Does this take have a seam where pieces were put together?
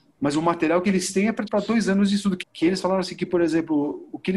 yes; 2 cuts; at 1.5 s, 2.4 s

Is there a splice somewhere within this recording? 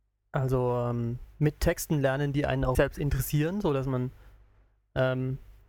yes; 1 cut; at 2.7 s

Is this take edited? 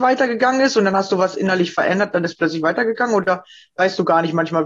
no; 0 cuts

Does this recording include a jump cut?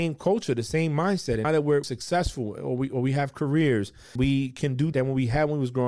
yes; 4 cuts; at 1.4 s, 1.8 s, 4.2 s, 4.9 s

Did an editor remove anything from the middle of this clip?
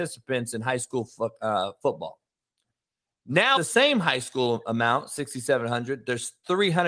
yes; 1 cut; at 3.6 s

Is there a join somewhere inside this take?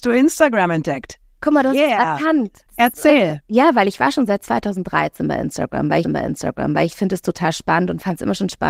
yes; 2 cuts; at 2.7 s, 6.0 s

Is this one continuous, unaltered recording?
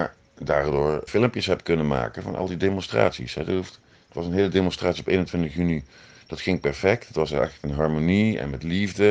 no; 1 cut; at 1.1 s

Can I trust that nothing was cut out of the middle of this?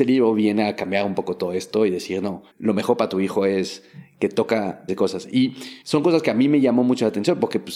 no; 3 cuts; at 2.5 s, 4.9 s, 5.8 s

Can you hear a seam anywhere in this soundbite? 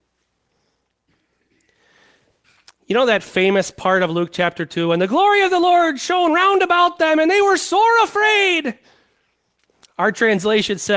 no; 0 cuts

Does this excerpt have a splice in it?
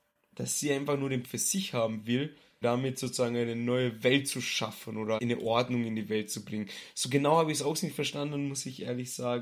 yes; 3 cuts; at 1.2 s, 2.6 s, 5.2 s

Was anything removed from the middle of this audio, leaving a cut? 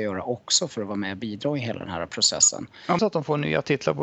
yes; 1 cut; at 3.0 s

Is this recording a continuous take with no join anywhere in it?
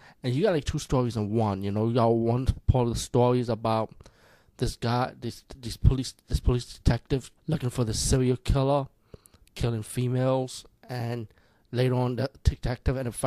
no; 1 cut; at 7.4 s

